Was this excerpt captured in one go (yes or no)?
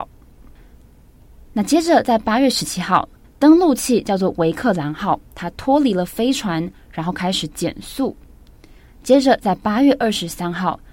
no